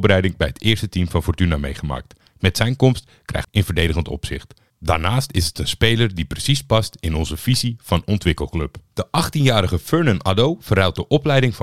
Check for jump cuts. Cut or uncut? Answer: cut